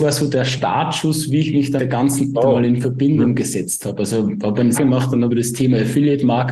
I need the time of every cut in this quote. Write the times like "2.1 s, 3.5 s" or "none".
1.8 s, 2.3 s, 4.7 s, 5.3 s